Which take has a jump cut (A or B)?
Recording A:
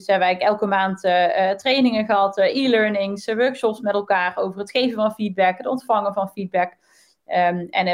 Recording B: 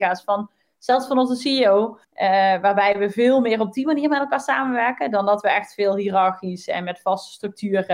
B